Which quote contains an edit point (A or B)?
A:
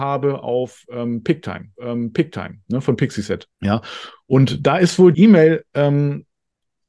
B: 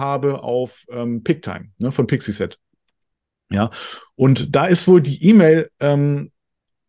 A